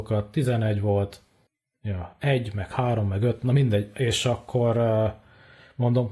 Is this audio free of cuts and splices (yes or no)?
no